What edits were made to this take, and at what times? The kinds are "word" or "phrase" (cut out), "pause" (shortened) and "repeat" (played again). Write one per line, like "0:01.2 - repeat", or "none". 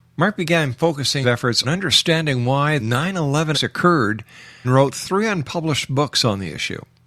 0:01.2 - word
0:01.6 - word
0:02.8 - word
0:03.5 - word
0:04.6 - word

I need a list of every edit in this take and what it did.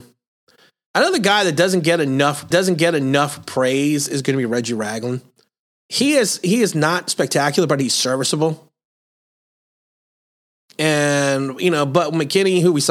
0:02.5 - repeat

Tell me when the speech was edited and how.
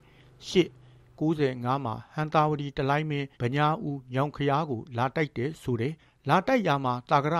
0:01.2 - word
0:03.3 - pause
0:06.0 - pause

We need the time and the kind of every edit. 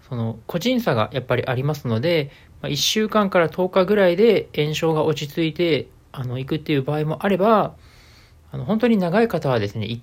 none

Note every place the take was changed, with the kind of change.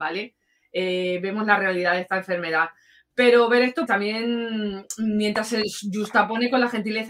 0:03.9 - word

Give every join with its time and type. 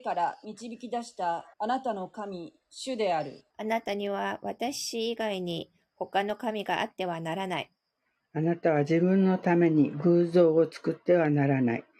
0:01.5 - pause
0:03.5 - pause
0:07.9 - pause

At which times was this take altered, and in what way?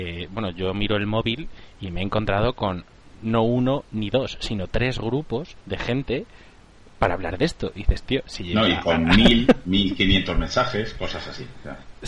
0:05.6 - pause

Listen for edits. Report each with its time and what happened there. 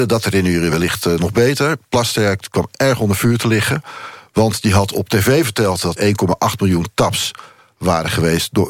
0:06.0 - word

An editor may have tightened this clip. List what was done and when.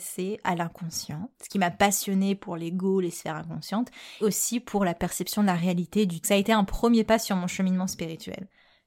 0:01.3 - pause
0:04.2 - word
0:06.2 - phrase

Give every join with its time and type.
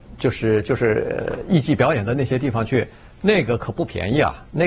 none

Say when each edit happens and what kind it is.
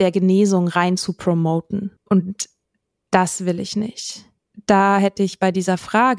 0:02.0 - pause

